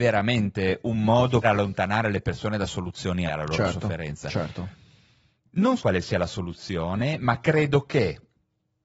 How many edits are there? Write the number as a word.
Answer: three